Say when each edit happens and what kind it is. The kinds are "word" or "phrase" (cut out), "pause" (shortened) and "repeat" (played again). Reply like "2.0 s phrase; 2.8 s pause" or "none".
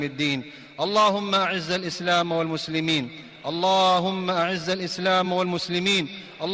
none